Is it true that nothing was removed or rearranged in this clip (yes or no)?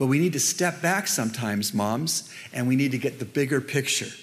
yes